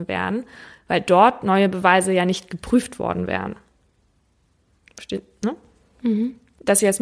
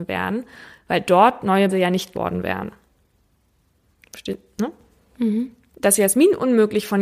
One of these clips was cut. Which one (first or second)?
second